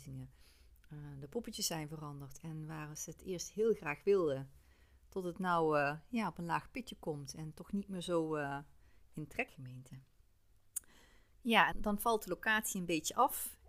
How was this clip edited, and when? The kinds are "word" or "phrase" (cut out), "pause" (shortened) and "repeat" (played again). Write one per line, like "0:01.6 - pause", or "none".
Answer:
0:09.5 - phrase
0:11.7 - word

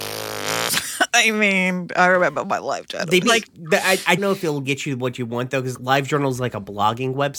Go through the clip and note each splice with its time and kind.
0:03.2 - word
0:04.2 - word
0:05.7 - word

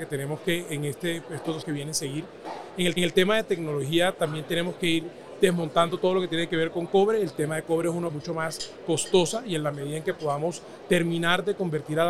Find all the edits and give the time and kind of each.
0:01.6 - word
0:03.0 - repeat
0:08.1 - word

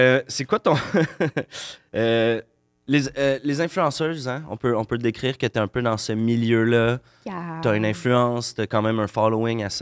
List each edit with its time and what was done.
none

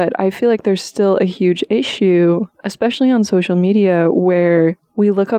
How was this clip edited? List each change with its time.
none

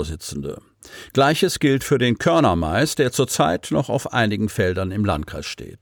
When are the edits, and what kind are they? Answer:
none

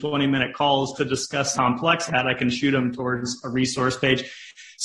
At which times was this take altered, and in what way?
0:00.9 - word
0:01.5 - word
0:02.1 - word

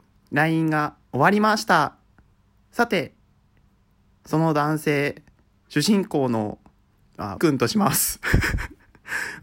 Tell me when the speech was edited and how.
0:07.4 - word

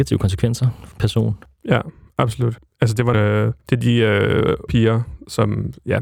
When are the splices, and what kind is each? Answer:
0:00.9 - word
0:03.1 - word
0:04.7 - word

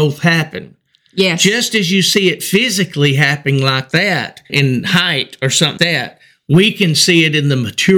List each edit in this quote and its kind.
0:04.5 - word
0:05.8 - word

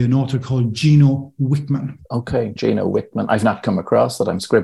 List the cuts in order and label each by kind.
0:02.0 - pause

